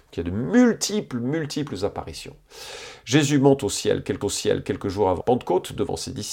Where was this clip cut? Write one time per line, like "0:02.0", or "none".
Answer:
0:04.2
0:05.2